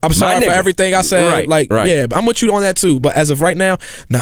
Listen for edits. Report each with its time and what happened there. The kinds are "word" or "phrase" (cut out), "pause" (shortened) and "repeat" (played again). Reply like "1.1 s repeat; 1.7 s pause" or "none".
none